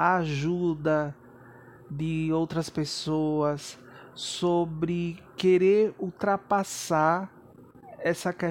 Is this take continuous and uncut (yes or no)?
yes